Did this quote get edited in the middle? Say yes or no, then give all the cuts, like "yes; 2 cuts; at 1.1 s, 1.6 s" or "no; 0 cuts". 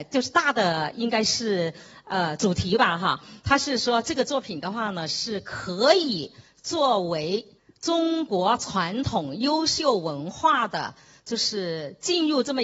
yes; 1 cut; at 7.6 s